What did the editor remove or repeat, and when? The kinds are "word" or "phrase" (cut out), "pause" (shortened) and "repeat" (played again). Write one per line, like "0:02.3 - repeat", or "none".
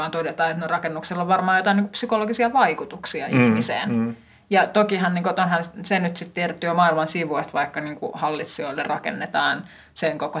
none